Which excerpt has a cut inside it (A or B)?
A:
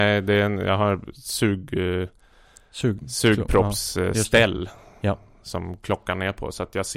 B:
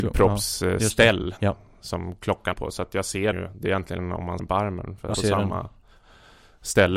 B